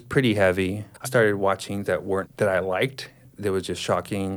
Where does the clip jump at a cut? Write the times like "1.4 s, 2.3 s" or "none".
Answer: 1.0 s, 1.9 s, 2.2 s